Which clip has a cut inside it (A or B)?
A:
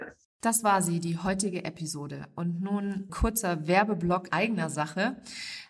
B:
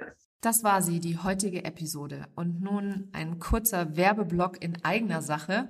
A